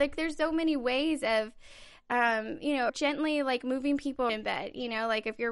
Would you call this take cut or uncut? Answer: cut